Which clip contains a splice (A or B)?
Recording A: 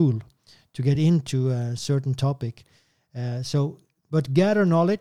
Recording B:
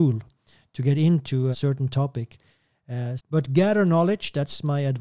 B